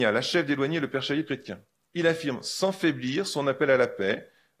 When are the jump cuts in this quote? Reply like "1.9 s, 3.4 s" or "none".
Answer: 1.3 s, 1.8 s

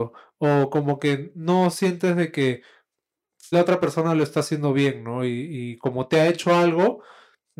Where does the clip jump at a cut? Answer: 3.5 s

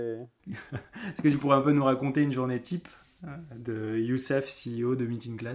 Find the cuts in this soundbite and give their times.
1.4 s

